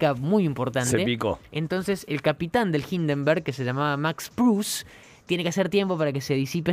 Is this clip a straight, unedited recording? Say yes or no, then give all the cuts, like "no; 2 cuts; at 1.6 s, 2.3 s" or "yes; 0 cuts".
yes; 0 cuts